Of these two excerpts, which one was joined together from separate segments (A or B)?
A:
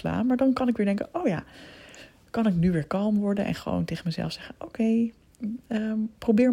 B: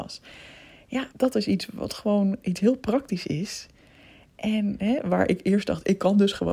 B